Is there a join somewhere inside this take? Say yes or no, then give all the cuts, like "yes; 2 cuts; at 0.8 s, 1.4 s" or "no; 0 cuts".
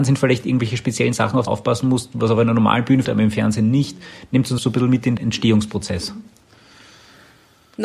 yes; 4 cuts; at 1.5 s, 3.0 s, 4.6 s, 5.2 s